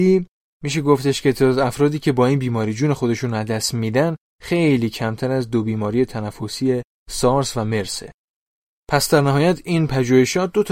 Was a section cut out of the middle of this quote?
no; 0 cuts

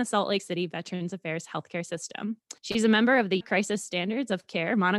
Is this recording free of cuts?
no; 2 cuts; at 2.6 s, 3.4 s

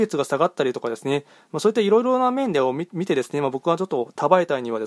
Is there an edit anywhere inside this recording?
no; 0 cuts

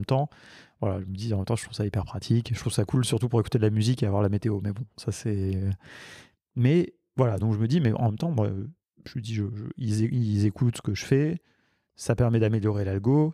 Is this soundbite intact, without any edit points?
yes; 0 cuts

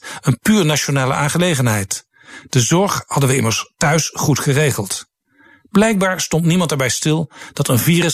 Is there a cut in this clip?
no; 0 cuts

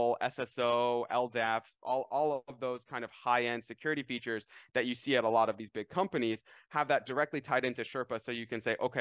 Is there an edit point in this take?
no; 0 cuts

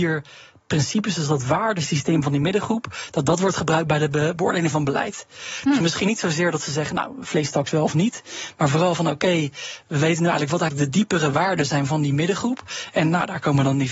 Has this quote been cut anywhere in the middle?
no; 0 cuts

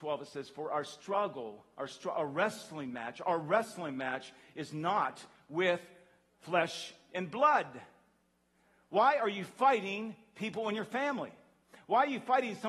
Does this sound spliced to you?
no; 0 cuts

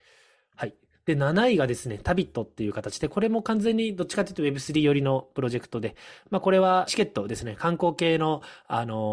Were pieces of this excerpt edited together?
yes; 1 cut; at 6.9 s

